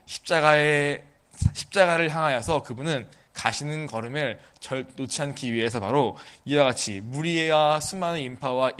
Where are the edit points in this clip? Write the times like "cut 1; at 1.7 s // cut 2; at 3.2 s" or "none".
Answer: none